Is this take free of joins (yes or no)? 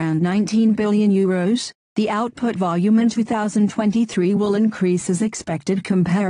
yes